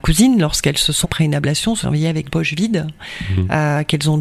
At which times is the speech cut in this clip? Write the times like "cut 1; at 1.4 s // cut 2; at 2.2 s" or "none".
cut 1; at 1.0 s // cut 2; at 1.8 s // cut 3; at 2.3 s